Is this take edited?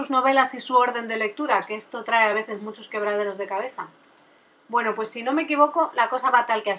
no; 0 cuts

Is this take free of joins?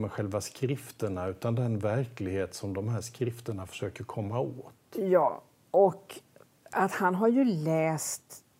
yes; 0 cuts

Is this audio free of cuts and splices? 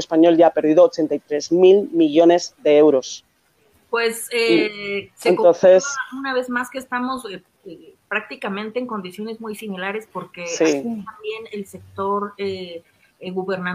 yes; 0 cuts

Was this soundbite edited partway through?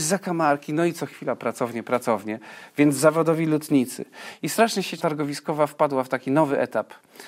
yes; 1 cut; at 5.0 s

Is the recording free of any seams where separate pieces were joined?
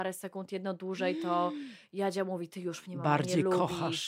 yes; 0 cuts

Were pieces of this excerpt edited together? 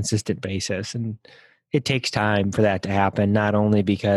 no; 0 cuts

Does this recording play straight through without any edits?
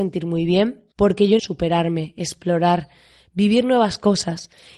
no; 2 cuts; at 0.9 s, 1.4 s

